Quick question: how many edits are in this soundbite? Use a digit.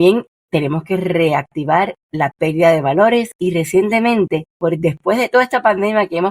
1